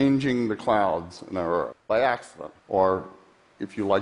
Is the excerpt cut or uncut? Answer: cut